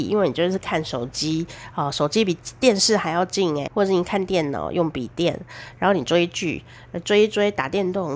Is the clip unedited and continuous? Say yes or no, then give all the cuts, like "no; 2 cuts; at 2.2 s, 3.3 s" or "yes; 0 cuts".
no; 1 cut; at 3.7 s